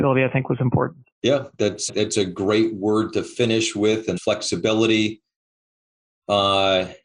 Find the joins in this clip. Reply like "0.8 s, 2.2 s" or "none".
1.1 s, 1.9 s, 4.2 s